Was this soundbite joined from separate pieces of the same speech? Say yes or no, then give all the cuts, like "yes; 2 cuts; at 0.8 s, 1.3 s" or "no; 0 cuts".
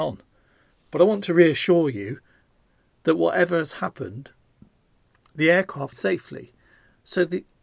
yes; 1 cut; at 5.9 s